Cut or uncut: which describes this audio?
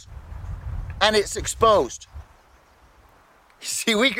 uncut